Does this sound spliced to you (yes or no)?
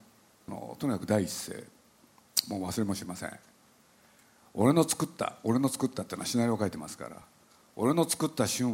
no